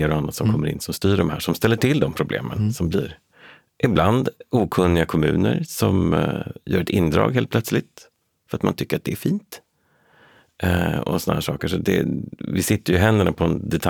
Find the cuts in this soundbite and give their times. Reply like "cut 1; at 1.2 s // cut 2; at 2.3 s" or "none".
none